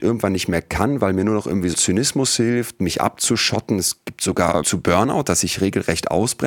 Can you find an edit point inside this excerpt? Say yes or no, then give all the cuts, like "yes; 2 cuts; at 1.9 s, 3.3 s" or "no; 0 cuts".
yes; 2 cuts; at 1.7 s, 4.6 s